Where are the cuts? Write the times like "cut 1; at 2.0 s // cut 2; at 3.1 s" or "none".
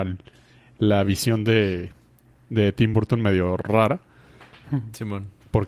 none

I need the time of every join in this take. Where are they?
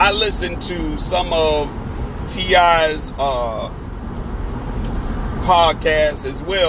none

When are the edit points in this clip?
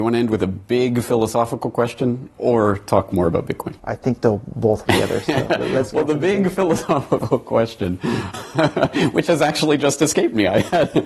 cut 1; at 3.8 s // cut 2; at 4.9 s // cut 3; at 8.3 s

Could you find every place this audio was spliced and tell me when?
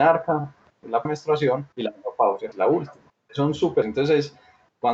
cut 1; at 1.0 s // cut 2; at 1.7 s // cut 3; at 2.5 s // cut 4; at 3.1 s // cut 5; at 3.8 s

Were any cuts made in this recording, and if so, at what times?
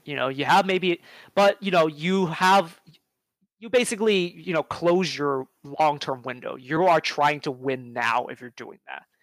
none

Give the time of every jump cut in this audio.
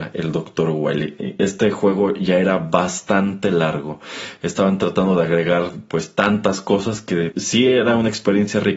cut 1; at 7.3 s

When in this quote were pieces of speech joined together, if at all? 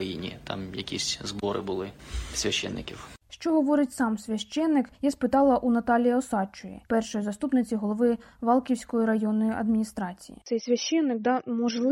cut 1; at 4.9 s // cut 2; at 6.9 s // cut 3; at 10.4 s

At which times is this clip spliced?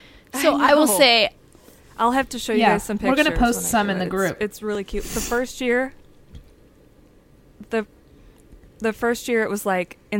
none

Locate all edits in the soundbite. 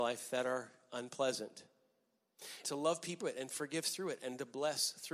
cut 1; at 2.6 s // cut 2; at 3.2 s

